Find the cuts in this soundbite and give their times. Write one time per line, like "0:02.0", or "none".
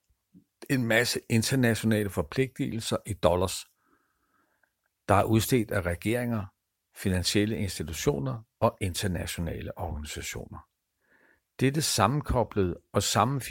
none